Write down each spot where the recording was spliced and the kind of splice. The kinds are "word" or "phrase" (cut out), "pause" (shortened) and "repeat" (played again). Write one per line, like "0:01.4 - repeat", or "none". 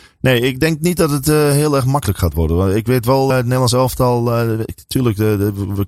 0:03.3 - word